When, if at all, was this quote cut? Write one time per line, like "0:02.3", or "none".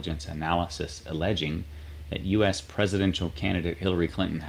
none